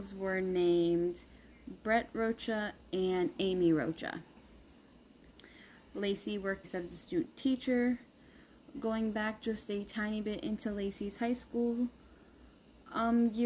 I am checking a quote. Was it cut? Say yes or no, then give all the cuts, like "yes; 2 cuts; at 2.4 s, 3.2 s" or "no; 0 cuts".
yes; 1 cut; at 6.6 s